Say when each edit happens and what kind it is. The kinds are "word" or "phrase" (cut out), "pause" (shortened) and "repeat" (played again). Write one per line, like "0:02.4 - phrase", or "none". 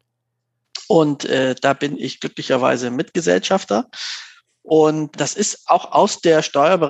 0:05.1 - word